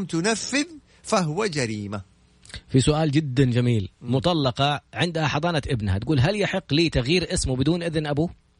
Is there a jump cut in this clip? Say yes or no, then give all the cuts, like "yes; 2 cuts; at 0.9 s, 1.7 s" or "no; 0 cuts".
no; 0 cuts